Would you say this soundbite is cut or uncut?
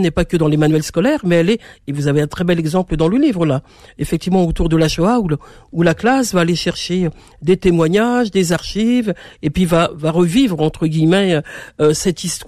uncut